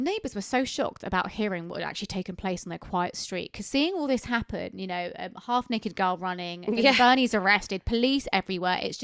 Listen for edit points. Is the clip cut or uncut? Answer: uncut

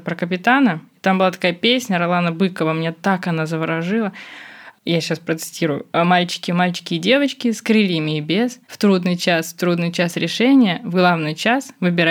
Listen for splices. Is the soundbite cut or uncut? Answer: cut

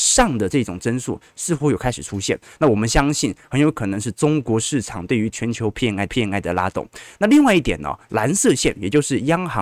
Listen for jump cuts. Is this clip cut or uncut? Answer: cut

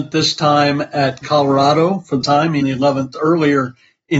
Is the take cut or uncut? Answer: cut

